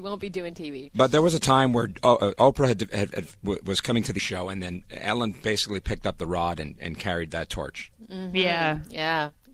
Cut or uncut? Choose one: cut